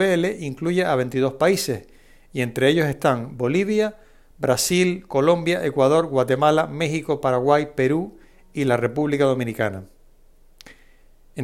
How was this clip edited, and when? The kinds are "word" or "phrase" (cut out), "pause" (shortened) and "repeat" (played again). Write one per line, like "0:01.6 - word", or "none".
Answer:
none